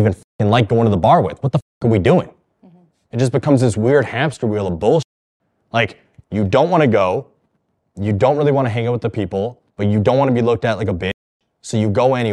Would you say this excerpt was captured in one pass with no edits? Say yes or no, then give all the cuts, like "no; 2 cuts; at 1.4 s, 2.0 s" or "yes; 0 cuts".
yes; 0 cuts